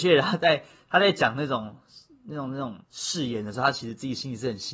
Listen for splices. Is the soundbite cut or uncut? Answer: cut